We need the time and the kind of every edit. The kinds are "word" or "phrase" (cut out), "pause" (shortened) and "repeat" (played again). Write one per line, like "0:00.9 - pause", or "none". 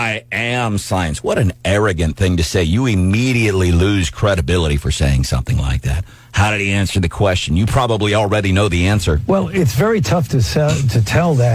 none